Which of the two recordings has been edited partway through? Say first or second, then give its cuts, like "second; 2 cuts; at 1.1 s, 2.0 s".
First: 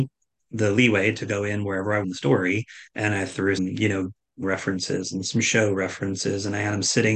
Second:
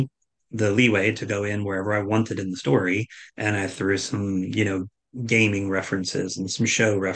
first; 3 cuts; at 2.0 s, 3.6 s, 4.4 s